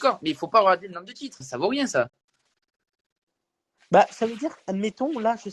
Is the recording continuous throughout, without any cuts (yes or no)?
no